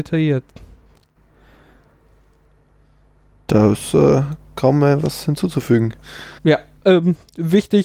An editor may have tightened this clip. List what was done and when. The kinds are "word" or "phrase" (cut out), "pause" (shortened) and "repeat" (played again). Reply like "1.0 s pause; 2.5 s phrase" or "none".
6.4 s pause